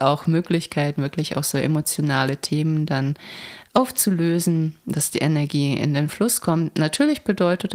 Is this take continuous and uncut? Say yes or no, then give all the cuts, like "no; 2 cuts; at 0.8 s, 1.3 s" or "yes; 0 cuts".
yes; 0 cuts